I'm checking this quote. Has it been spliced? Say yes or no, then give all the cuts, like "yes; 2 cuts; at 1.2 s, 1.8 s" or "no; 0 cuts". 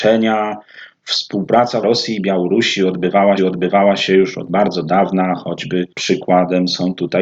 yes; 3 cuts; at 1.8 s, 3.4 s, 5.9 s